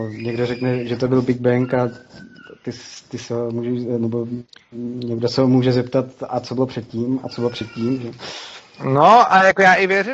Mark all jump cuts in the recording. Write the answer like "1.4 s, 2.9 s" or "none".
none